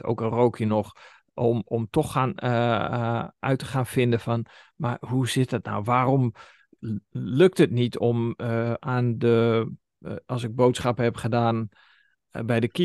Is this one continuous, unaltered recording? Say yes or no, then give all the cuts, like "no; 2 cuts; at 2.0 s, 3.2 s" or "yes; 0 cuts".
yes; 0 cuts